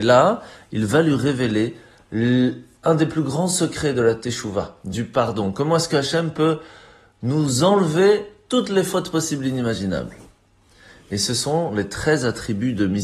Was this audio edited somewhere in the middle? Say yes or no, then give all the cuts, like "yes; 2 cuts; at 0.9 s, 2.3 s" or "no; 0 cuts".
no; 0 cuts